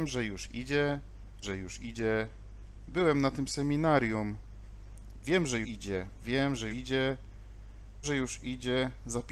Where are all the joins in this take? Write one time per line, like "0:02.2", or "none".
0:01.4
0:05.6
0:06.7
0:08.0